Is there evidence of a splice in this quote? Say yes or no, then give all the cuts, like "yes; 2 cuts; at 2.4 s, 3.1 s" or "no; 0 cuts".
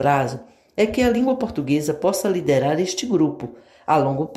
no; 0 cuts